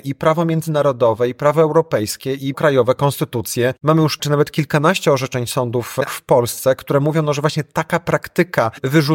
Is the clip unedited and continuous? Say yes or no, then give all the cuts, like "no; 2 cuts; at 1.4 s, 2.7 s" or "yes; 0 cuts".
no; 3 cuts; at 2.5 s, 4.2 s, 6.1 s